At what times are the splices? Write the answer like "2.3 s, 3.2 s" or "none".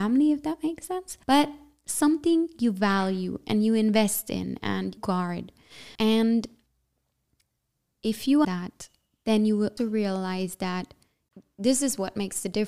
1.2 s, 5.0 s, 5.9 s, 8.4 s, 9.8 s

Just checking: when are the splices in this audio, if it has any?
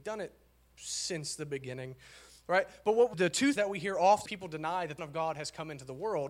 3.1 s, 3.6 s, 4.3 s, 5.0 s

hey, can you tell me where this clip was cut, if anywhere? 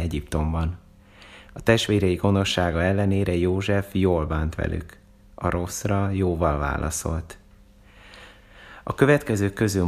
none

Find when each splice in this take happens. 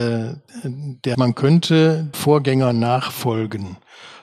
1.1 s, 2.1 s

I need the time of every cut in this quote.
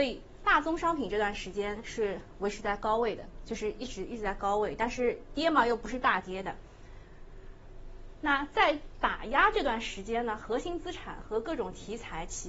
none

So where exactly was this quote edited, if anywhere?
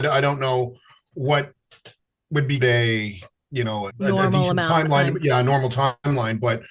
2.6 s, 3.9 s

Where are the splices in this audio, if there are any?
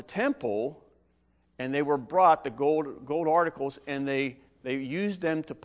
none

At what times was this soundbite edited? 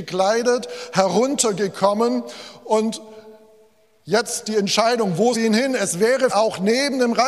5.3 s, 6.3 s

